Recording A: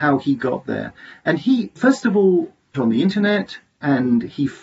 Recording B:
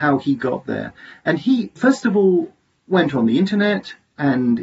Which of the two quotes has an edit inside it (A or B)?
A